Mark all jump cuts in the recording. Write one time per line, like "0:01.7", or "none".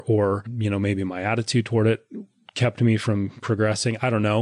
none

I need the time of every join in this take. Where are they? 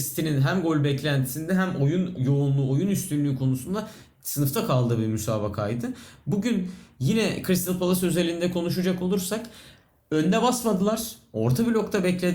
none

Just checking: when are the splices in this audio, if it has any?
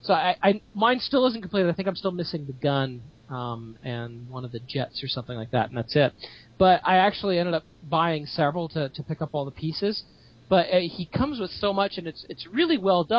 none

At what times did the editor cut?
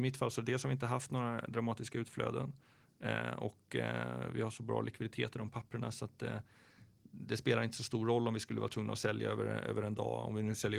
none

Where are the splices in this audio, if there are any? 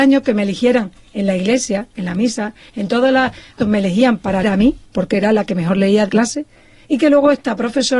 0:03.6
0:04.4
0:04.9
0:06.1

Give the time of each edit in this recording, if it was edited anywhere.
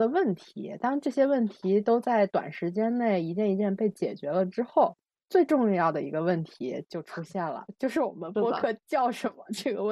0:05.2

